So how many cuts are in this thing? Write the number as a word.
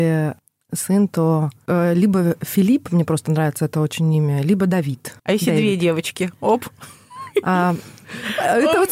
one